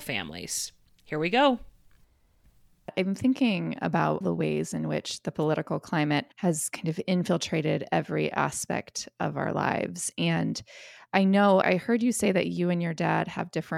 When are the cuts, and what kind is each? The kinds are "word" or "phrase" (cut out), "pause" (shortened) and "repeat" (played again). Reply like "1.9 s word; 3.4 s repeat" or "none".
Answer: 4.2 s word; 6.3 s pause; 11.6 s word